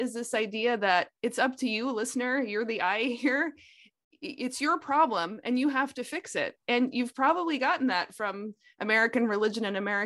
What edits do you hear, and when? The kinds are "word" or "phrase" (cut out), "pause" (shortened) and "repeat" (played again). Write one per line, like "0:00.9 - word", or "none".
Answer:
none